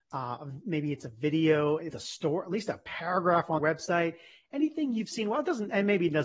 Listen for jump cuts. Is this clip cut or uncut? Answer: cut